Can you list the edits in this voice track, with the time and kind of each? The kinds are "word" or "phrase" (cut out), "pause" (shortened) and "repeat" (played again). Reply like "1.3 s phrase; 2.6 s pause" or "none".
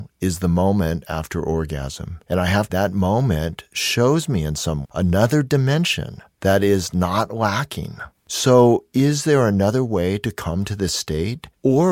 2.7 s phrase; 4.8 s word